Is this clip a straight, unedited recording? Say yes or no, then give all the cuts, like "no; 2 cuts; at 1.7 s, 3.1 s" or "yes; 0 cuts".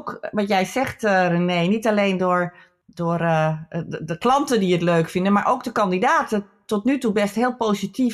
yes; 0 cuts